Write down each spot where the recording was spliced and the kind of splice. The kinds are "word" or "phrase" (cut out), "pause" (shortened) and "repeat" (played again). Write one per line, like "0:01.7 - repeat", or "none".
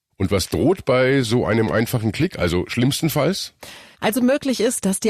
none